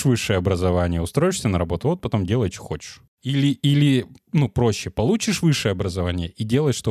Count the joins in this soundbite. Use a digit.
0